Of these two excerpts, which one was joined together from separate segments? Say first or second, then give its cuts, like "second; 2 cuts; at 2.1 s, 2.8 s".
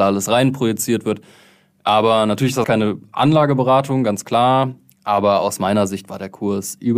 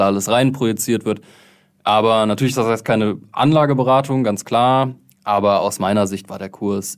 first; 1 cut; at 2.6 s